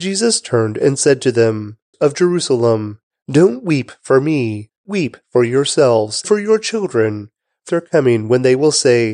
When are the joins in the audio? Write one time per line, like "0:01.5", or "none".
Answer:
0:01.9
0:04.9
0:06.2
0:07.7

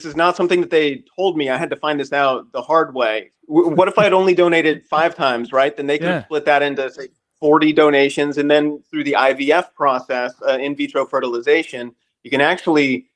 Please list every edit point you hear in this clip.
none

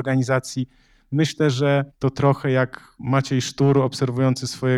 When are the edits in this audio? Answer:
0:01.9
0:03.0

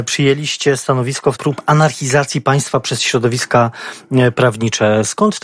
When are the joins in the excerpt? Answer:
0:01.3

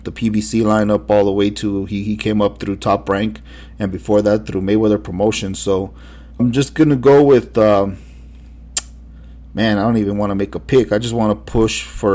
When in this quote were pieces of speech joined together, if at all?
0:06.4

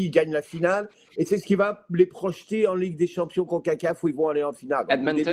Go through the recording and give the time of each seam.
none

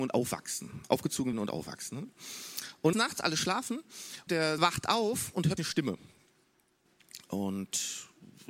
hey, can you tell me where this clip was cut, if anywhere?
0:01.3
0:02.9
0:04.3
0:04.6
0:05.6

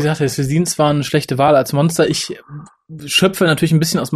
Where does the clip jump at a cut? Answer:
none

